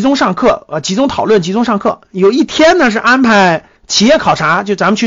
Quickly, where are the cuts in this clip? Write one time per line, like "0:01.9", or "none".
0:03.8

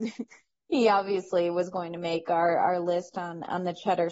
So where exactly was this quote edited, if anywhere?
none

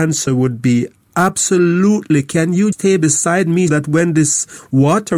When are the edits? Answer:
0:02.7
0:03.7

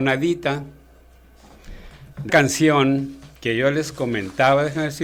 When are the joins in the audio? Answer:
0:02.3
0:03.4

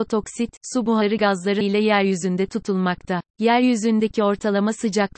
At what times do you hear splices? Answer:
0:01.2
0:01.6
0:03.3

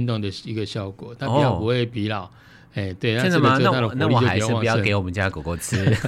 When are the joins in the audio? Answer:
none

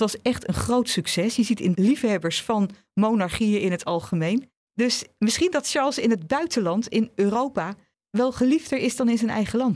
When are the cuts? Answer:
0:01.7
0:07.9

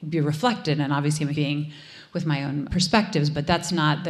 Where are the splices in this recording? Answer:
0:01.3
0:02.7

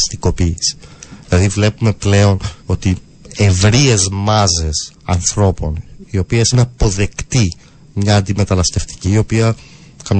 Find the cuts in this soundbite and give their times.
0:02.6
0:04.9
0:06.5
0:09.0

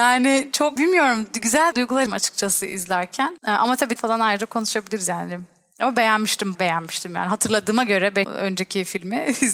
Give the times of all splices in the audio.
0:01.7
0:02.1
0:04.0
0:06.5
0:08.2

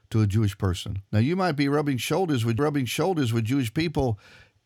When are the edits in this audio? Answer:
0:01.1
0:02.6

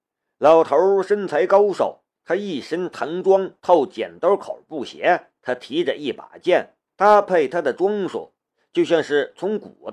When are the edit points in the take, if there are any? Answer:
0:02.1
0:03.6
0:05.4
0:06.9

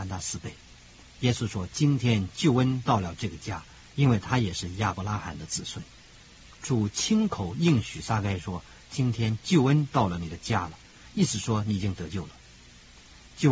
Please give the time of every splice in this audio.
none

